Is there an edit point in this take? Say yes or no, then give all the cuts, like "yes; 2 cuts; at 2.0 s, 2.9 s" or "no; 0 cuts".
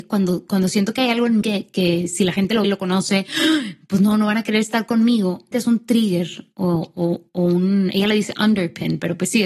yes; 3 cuts; at 1.4 s, 2.6 s, 5.5 s